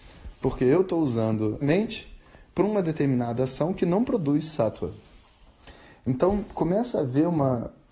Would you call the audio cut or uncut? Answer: cut